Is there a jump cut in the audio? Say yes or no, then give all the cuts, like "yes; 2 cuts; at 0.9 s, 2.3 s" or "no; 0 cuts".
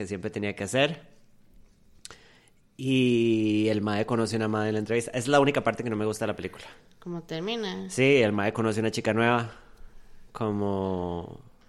no; 0 cuts